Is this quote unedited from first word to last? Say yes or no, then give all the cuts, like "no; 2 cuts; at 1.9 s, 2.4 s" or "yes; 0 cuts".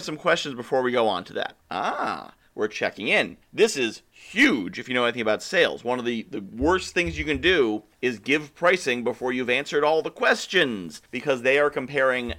no; 4 cuts; at 1.6 s, 3.4 s, 7.9 s, 11.1 s